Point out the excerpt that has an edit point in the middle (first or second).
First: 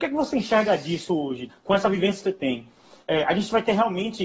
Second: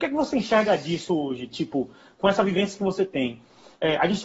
first